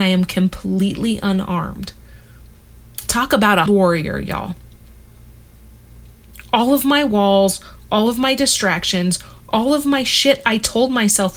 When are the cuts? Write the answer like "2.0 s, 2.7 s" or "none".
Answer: 3.7 s